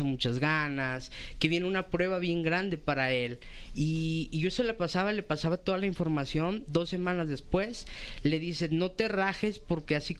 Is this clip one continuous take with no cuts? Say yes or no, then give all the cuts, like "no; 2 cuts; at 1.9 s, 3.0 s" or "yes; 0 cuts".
yes; 0 cuts